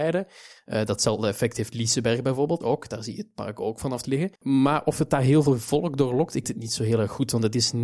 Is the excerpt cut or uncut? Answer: cut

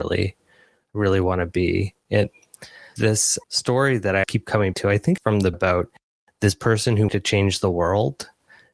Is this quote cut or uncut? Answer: cut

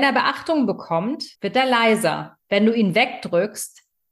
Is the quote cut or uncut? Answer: cut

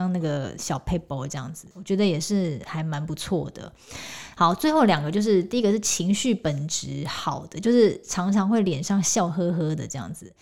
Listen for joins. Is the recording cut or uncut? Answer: cut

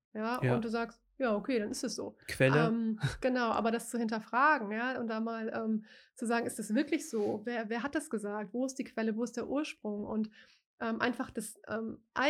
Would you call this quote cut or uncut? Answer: uncut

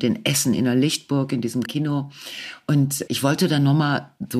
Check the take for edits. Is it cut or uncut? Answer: cut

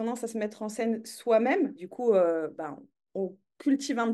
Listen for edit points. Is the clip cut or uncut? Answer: cut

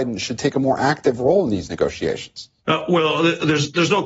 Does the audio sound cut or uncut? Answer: cut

